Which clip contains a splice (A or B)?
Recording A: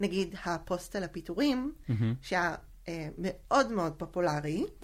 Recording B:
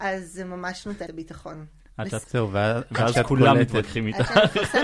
B